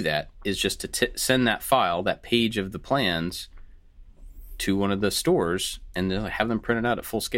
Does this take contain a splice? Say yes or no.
no